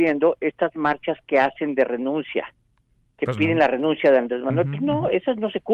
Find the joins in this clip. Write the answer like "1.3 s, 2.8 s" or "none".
none

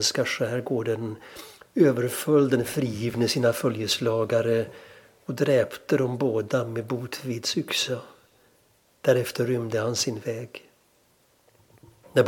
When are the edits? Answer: none

